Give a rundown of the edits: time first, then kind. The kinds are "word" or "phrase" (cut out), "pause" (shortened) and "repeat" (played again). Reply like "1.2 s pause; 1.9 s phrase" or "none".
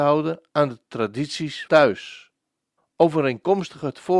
1.7 s word; 2.8 s pause